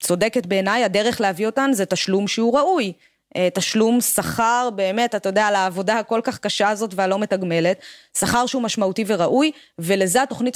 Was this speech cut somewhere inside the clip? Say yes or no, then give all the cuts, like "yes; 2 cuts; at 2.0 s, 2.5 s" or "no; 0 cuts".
no; 0 cuts